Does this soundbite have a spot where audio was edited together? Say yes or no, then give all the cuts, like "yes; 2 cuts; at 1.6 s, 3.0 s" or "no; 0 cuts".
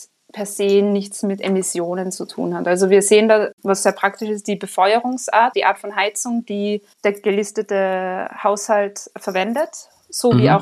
yes; 1 cut; at 5.5 s